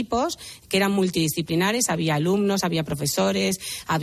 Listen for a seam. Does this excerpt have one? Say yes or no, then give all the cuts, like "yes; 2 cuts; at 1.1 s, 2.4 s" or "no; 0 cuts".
no; 0 cuts